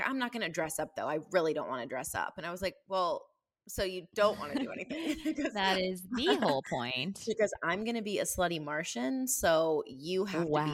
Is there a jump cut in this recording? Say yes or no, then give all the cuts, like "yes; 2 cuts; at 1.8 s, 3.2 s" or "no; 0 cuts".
no; 0 cuts